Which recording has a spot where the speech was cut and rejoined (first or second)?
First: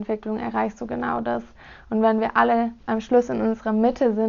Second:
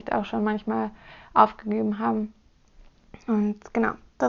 first